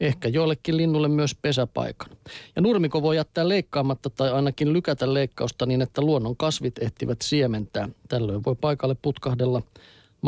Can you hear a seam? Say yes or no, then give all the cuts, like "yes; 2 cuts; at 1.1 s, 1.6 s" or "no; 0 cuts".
no; 0 cuts